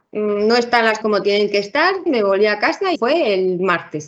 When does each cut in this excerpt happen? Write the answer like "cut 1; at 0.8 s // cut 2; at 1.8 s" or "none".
cut 1; at 1.0 s // cut 2; at 2.1 s // cut 3; at 2.9 s